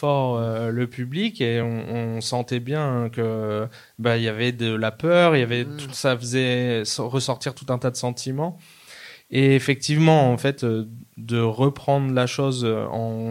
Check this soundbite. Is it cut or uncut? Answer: uncut